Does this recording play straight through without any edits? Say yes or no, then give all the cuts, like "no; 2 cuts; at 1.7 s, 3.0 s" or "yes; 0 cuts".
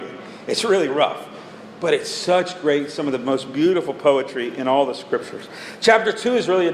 yes; 0 cuts